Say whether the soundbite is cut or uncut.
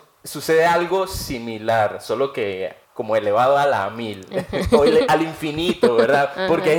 cut